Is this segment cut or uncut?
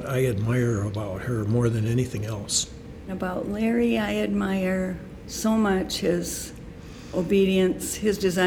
uncut